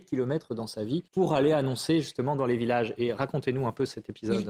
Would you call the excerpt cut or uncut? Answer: cut